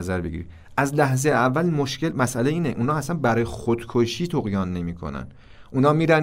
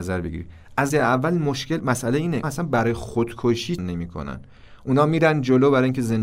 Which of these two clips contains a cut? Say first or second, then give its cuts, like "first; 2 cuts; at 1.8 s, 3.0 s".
second; 3 cuts; at 0.9 s, 2.4 s, 3.8 s